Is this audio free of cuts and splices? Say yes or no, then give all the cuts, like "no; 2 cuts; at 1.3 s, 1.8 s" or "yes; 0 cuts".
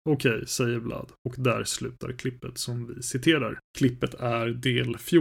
no; 2 cuts; at 1.2 s, 3.7 s